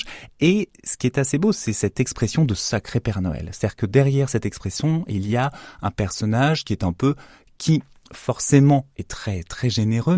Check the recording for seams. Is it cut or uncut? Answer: uncut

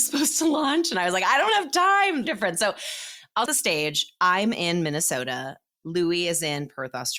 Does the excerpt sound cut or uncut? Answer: cut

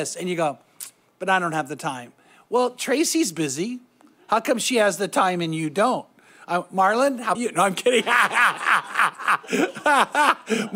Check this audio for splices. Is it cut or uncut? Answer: cut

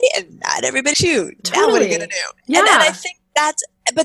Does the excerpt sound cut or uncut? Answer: cut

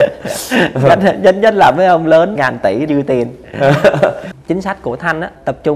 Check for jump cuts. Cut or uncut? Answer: cut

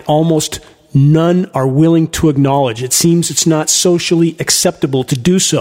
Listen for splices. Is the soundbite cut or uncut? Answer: uncut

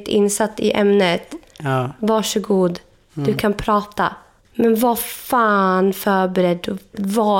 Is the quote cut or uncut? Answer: uncut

